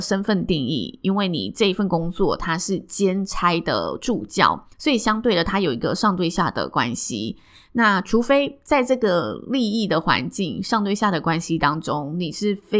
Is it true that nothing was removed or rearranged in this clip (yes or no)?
no